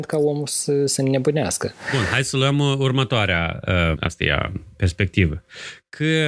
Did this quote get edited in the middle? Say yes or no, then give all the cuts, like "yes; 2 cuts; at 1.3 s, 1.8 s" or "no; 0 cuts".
yes; 1 cut; at 4.0 s